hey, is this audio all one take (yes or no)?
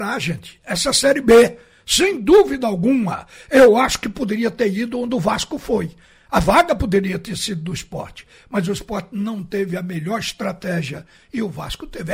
yes